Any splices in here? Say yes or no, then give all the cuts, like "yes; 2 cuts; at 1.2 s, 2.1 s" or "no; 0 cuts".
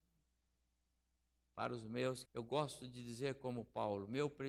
yes; 1 cut; at 2.3 s